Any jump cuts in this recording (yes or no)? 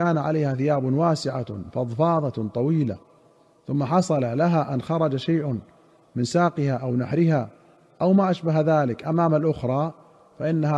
no